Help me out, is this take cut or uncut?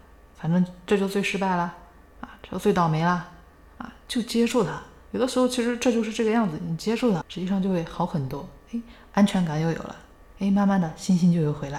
cut